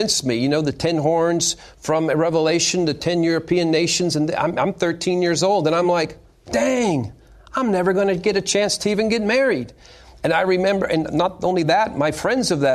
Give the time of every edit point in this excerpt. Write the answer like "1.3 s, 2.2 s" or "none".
none